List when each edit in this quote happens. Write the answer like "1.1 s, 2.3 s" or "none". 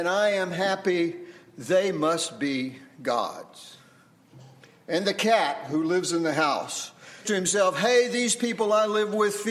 7.3 s